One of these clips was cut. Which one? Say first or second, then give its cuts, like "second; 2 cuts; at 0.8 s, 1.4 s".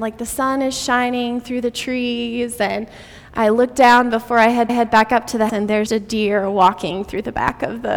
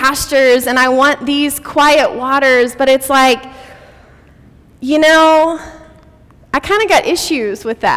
first; 3 cuts; at 4.7 s, 5.5 s, 5.9 s